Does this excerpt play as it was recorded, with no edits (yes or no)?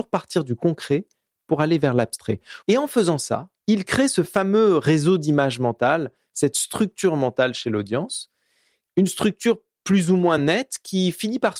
yes